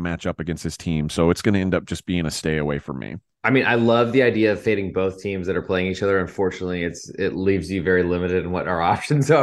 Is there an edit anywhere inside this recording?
no; 0 cuts

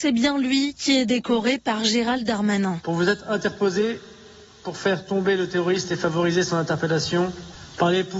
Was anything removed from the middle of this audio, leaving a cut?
no; 0 cuts

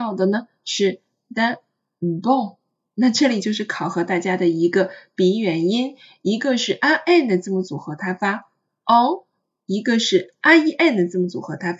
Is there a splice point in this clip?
no; 0 cuts

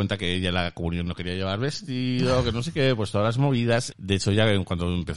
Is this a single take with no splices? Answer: no; 1 cut; at 3.9 s

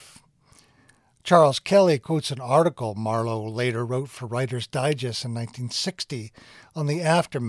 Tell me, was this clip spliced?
no; 0 cuts

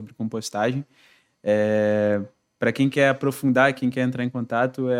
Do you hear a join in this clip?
no; 0 cuts

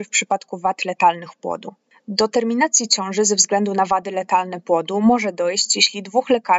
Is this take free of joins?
yes; 0 cuts

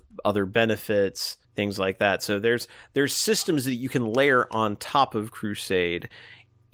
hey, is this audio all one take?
no; 1 cut; at 1.4 s

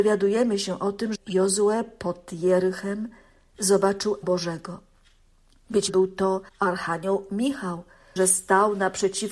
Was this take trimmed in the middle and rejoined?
yes; 5 cuts; at 1.1 s, 4.2 s, 5.9 s, 6.5 s, 8.2 s

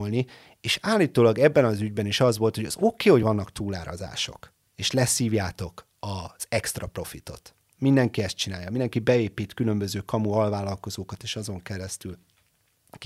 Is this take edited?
no; 0 cuts

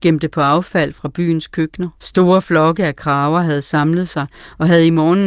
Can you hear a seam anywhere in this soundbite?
yes; 1 cut; at 2.0 s

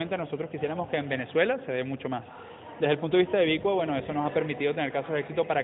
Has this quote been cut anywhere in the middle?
no; 0 cuts

